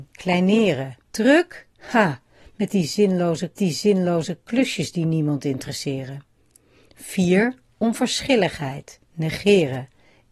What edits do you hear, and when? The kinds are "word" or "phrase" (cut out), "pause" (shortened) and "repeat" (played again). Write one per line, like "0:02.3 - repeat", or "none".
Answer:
0:01.0 - pause
0:03.6 - repeat